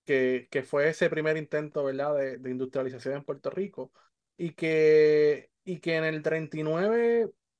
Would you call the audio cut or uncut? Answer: uncut